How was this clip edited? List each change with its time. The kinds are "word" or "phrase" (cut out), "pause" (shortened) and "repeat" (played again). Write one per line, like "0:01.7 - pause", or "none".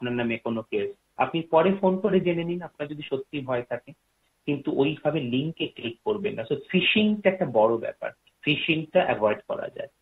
none